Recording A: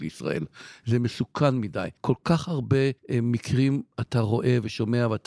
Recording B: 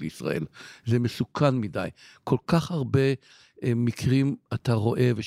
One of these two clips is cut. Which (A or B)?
A